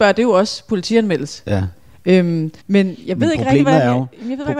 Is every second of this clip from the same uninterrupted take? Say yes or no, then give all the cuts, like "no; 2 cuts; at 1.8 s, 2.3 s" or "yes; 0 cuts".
no; 1 cut; at 2.6 s